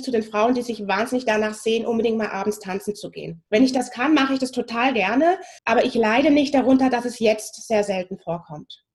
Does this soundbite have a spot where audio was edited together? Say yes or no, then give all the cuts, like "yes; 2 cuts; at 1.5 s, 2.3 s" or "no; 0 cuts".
yes; 2 cuts; at 3.5 s, 5.6 s